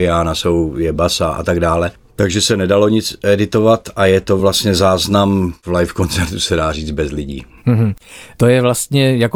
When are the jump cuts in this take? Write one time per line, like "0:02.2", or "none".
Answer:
none